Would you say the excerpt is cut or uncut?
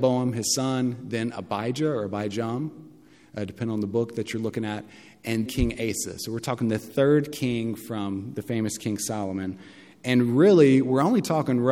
cut